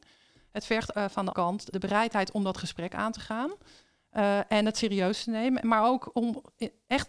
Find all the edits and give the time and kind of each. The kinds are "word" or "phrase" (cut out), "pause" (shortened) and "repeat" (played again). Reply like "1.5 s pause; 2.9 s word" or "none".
0.9 s word; 1.3 s word; 1.7 s word